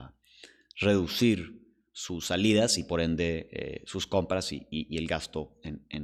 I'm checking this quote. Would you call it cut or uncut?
uncut